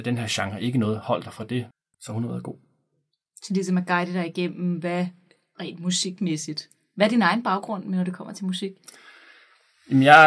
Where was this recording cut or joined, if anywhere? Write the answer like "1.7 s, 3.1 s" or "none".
none